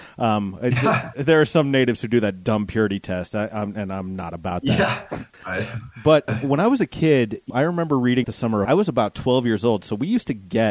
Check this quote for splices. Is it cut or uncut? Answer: cut